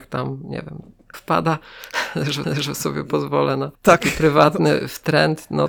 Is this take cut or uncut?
cut